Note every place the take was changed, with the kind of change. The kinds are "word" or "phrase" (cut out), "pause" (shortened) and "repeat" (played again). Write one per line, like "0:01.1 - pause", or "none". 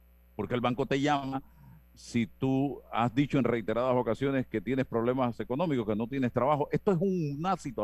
none